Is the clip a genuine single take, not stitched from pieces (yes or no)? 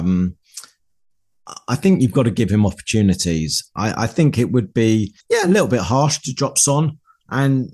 no